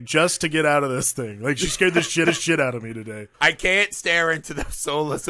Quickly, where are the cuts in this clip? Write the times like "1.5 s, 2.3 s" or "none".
2.3 s, 3.3 s

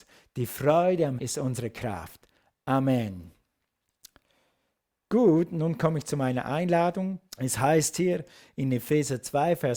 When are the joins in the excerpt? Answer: 1.2 s, 7.3 s

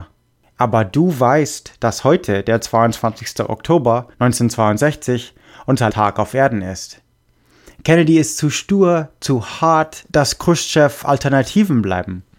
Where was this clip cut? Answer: 4.1 s, 5.9 s, 10.1 s

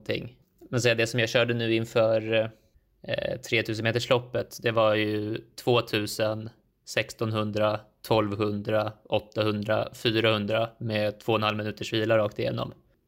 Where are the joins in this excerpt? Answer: none

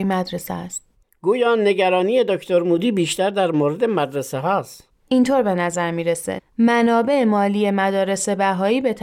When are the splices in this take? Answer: 6.4 s

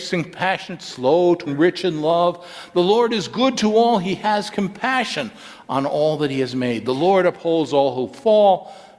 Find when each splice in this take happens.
1.5 s

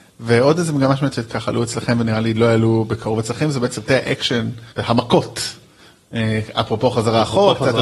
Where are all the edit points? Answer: 4.7 s

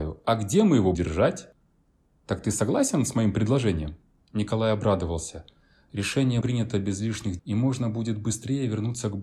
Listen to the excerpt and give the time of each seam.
0.9 s, 6.4 s, 7.4 s

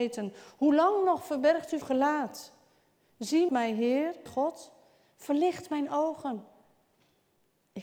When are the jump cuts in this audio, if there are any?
1.8 s, 3.5 s, 4.3 s

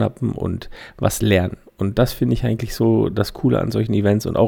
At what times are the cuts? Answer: none

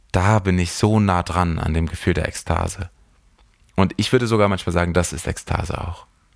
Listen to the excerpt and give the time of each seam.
none

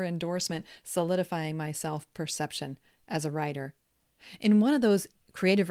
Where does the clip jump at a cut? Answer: none

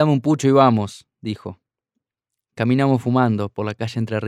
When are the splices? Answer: none

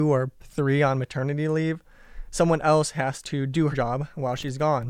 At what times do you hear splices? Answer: 3.7 s

